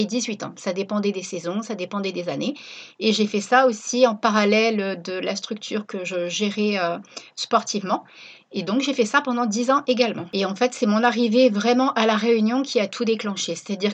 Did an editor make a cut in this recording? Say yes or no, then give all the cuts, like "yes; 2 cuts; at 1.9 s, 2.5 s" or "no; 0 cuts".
no; 0 cuts